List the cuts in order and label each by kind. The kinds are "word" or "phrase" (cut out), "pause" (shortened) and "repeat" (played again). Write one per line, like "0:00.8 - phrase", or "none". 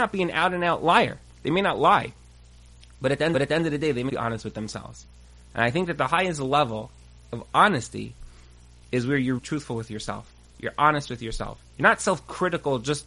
0:03.3 - repeat
0:04.1 - word
0:09.4 - word
0:11.7 - pause